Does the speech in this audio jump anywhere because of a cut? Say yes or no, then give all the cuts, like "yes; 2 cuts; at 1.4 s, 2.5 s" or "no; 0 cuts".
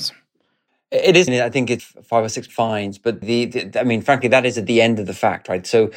yes; 4 cuts; at 1.3 s, 1.8 s, 2.5 s, 3.2 s